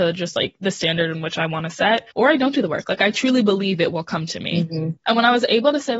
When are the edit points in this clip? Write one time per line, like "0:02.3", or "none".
0:02.1
0:05.0